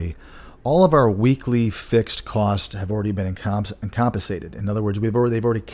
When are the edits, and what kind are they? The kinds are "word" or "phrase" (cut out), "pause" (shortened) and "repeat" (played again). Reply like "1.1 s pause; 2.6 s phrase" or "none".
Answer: none